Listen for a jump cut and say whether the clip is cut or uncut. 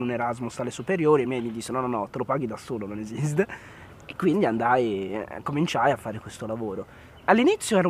uncut